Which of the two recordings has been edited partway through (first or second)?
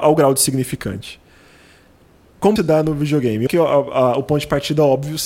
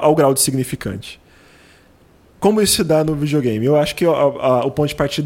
first